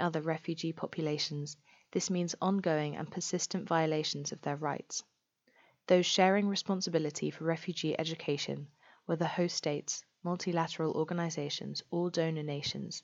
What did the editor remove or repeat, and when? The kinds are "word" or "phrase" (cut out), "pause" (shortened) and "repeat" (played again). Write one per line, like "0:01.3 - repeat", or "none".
none